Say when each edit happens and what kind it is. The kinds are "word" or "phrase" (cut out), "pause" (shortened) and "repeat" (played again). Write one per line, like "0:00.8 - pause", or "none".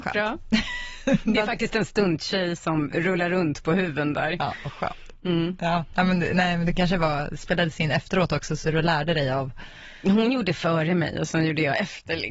none